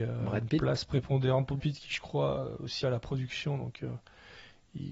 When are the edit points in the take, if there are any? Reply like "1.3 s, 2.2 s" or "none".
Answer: 1.6 s, 2.8 s